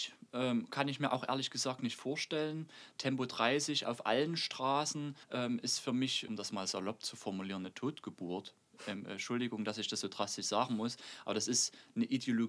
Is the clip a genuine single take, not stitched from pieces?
no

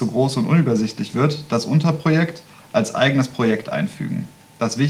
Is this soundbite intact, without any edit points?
yes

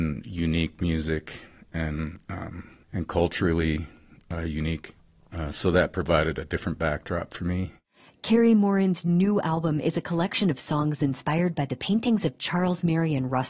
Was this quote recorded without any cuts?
no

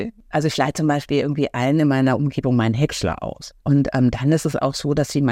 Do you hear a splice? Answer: yes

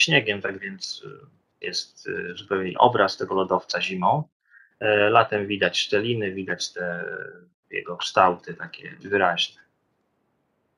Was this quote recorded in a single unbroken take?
no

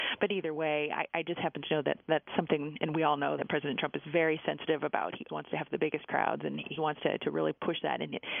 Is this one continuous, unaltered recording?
no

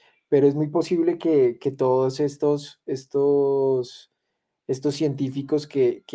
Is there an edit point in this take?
no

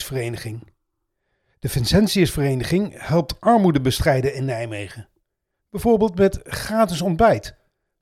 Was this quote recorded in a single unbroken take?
yes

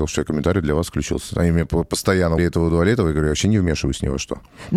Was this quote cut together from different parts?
yes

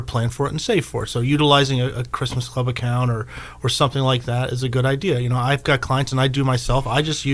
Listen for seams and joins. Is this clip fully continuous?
yes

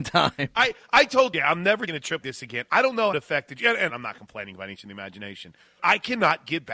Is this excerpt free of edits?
no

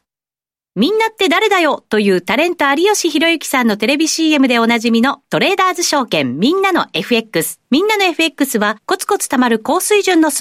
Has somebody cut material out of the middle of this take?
yes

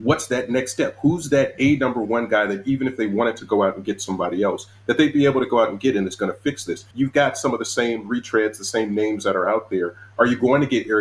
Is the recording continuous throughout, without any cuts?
no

